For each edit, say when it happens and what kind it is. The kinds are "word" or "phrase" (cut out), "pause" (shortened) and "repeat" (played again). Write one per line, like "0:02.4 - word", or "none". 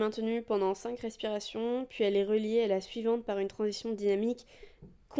none